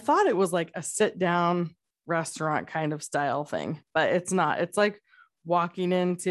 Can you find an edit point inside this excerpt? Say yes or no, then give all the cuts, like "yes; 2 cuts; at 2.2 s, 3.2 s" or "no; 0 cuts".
no; 0 cuts